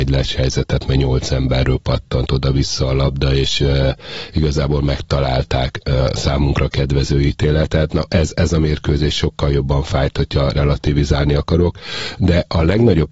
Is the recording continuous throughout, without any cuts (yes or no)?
yes